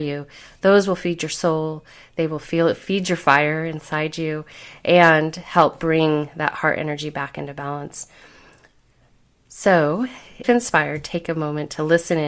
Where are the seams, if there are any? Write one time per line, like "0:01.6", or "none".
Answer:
0:10.4